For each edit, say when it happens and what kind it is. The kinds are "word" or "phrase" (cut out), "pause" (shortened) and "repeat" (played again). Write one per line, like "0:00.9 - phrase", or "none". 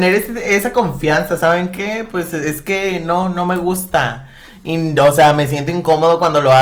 none